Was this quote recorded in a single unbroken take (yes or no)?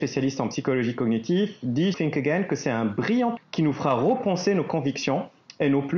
no